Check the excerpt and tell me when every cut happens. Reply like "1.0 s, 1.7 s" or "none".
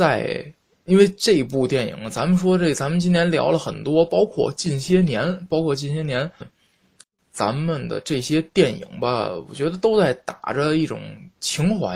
6.4 s